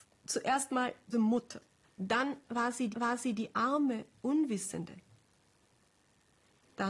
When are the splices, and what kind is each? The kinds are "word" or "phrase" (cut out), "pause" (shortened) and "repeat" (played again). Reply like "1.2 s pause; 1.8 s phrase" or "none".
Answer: 1.1 s phrase; 1.8 s pause; 2.9 s repeat

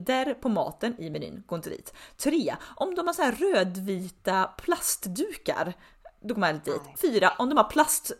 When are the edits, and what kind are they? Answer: none

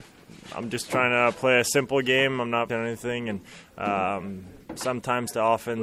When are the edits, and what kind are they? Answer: 2.7 s word

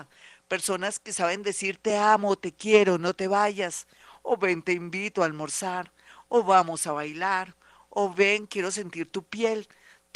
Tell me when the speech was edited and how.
none

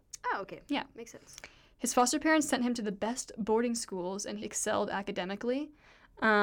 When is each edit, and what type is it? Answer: 4.4 s word

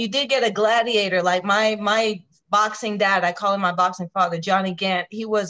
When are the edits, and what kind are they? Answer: none

